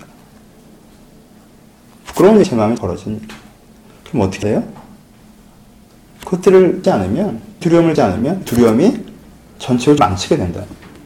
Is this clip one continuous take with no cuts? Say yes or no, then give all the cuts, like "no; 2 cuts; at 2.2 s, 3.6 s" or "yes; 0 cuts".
no; 8 cuts; at 2.4 s, 2.8 s, 4.4 s, 6.8 s, 7.6 s, 8.0 s, 8.5 s, 10.0 s